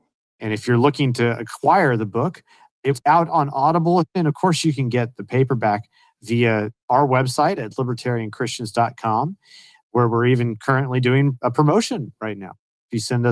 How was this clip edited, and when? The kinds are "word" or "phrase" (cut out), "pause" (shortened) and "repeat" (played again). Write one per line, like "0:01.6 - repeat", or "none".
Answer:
none